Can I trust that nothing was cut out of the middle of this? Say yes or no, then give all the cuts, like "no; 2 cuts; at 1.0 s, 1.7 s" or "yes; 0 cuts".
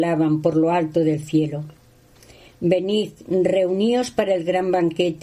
yes; 0 cuts